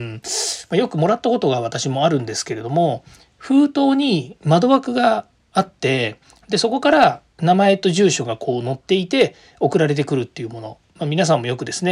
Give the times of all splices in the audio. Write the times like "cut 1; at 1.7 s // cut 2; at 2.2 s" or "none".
none